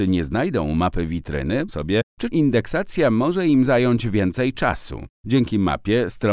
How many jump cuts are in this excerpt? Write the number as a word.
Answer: three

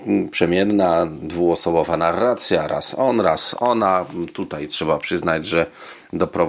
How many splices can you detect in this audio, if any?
zero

